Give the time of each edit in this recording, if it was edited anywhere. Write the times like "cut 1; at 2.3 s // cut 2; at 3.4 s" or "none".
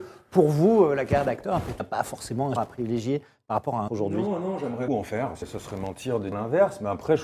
cut 1; at 1.8 s // cut 2; at 2.6 s // cut 3; at 3.9 s // cut 4; at 4.9 s // cut 5; at 5.4 s // cut 6; at 6.3 s